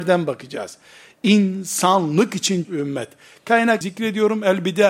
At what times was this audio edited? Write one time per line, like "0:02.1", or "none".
0:02.6
0:03.8